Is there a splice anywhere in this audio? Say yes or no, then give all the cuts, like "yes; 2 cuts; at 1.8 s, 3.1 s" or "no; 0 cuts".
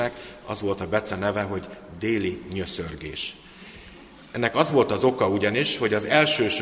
no; 0 cuts